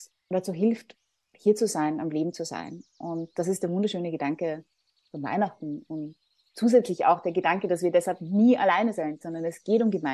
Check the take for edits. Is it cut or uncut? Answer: uncut